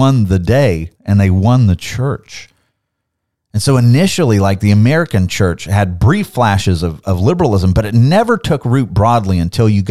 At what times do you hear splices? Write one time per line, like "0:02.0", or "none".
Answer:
0:00.9

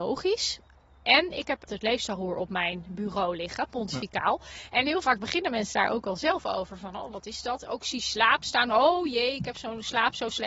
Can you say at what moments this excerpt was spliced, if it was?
0:01.7

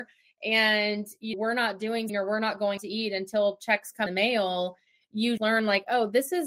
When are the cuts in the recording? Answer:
0:01.3
0:02.1
0:02.8
0:04.1
0:05.4

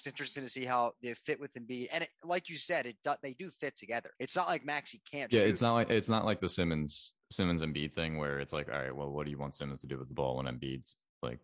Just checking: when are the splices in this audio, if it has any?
0:04.2

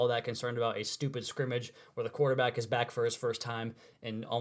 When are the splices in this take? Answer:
none

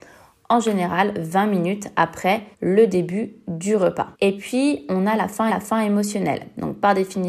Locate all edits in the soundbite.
0:02.5
0:04.1
0:05.5

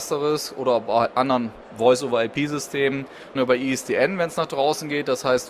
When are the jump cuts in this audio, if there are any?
0:03.4

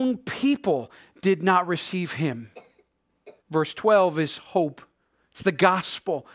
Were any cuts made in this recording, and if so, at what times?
0:03.4

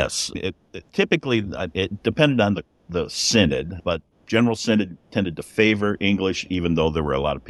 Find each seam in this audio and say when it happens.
none

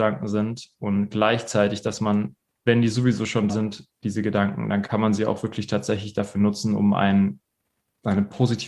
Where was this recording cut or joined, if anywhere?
0:03.5

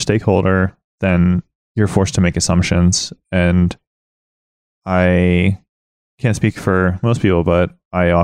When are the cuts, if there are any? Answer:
none

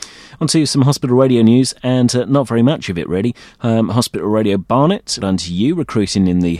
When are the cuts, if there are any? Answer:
0:05.2

